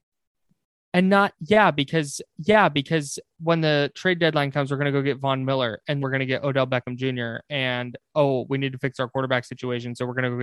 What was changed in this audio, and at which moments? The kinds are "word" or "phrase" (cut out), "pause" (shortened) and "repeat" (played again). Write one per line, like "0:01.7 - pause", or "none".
0:02.3 - repeat
0:06.0 - word